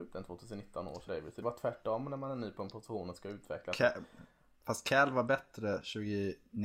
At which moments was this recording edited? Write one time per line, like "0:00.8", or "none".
0:01.1
0:01.4